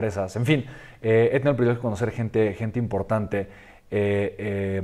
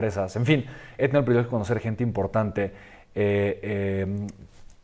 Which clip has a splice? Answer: second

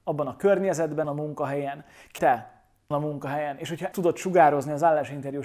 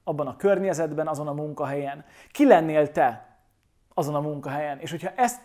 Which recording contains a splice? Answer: first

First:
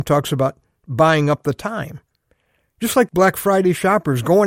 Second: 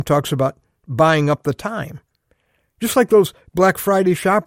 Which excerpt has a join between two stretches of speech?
first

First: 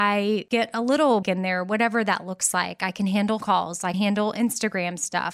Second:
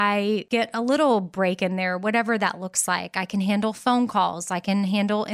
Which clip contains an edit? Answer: first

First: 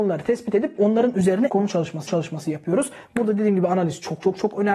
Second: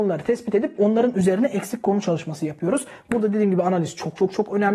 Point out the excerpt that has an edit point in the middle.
first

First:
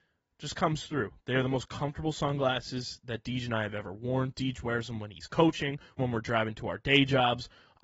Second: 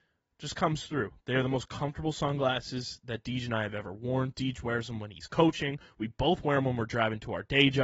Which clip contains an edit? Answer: first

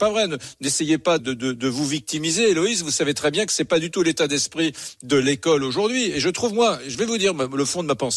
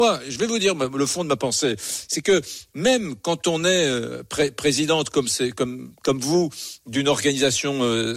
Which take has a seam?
first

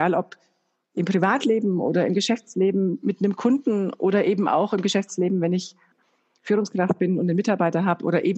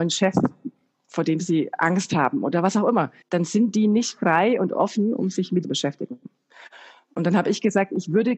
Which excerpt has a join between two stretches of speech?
second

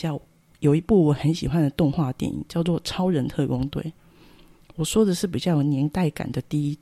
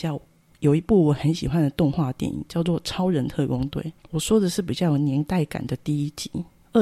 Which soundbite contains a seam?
second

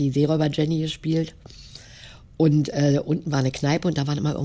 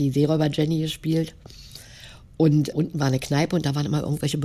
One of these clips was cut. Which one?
second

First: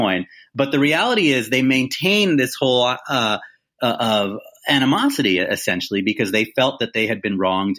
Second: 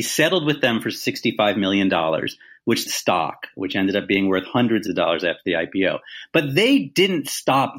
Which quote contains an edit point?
second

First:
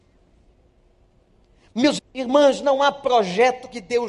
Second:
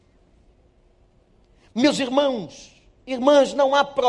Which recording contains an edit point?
first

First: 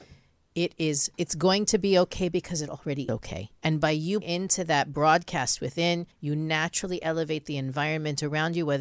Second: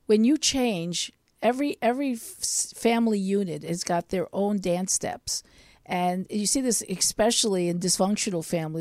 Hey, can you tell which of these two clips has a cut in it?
first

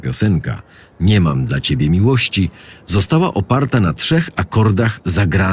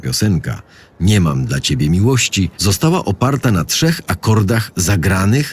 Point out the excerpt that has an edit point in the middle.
second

